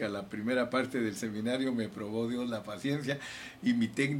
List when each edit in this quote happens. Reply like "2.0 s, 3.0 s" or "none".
none